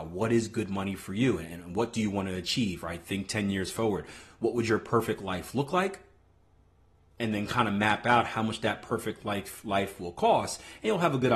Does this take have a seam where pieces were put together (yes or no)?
no